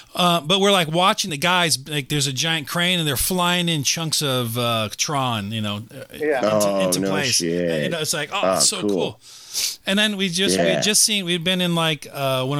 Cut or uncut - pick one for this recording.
uncut